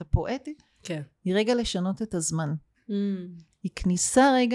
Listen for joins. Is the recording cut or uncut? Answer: uncut